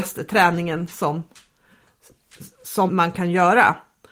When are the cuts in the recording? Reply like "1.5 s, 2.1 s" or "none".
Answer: 2.9 s